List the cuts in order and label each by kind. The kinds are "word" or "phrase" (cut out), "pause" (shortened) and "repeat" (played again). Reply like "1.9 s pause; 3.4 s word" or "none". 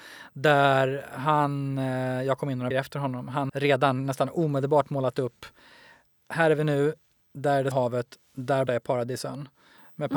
2.7 s word; 3.5 s word; 7.7 s word; 8.7 s word